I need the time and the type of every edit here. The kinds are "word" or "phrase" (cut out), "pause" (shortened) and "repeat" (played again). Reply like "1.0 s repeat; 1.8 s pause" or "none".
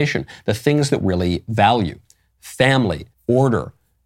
1.0 s phrase; 3.1 s pause